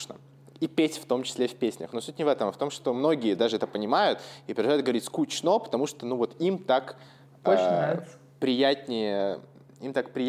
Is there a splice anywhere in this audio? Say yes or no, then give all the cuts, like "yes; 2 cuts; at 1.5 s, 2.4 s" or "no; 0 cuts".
no; 0 cuts